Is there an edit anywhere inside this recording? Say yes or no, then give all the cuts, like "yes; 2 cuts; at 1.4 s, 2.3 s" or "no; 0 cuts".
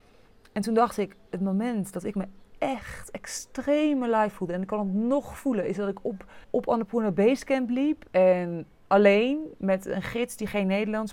yes; 2 cuts; at 6.4 s, 8.1 s